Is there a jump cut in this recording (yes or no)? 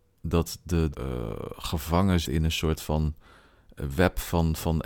yes